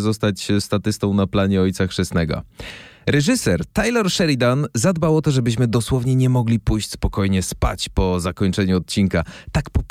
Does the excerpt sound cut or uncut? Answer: uncut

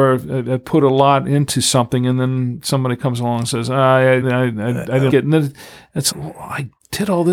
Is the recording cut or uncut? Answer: cut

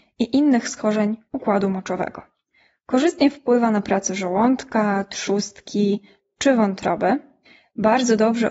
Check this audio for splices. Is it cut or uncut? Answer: uncut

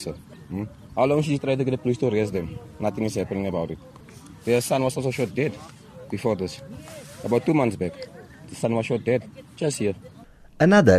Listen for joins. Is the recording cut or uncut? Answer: uncut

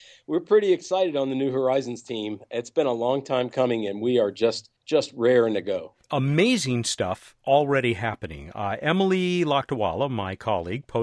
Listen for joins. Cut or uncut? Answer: cut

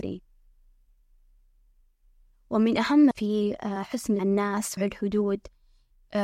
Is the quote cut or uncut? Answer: cut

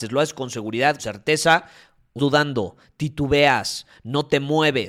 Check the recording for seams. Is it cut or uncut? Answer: cut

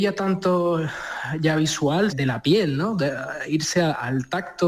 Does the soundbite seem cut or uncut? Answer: cut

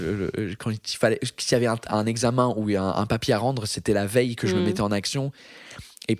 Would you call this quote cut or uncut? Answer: uncut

